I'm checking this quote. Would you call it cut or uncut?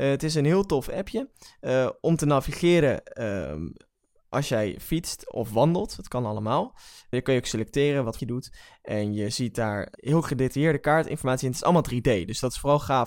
cut